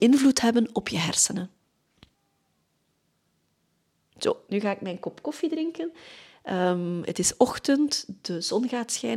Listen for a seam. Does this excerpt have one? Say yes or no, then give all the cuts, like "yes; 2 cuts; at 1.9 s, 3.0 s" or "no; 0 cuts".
no; 0 cuts